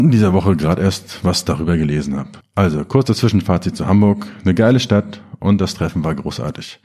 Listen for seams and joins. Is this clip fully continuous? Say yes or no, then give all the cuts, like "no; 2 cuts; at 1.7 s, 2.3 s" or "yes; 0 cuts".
no; 1 cut; at 2.4 s